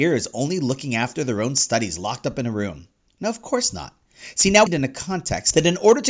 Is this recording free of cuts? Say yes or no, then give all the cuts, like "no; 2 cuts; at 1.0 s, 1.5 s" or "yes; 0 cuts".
no; 1 cut; at 4.7 s